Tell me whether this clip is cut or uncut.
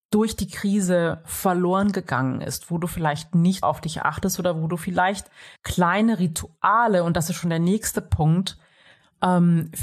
cut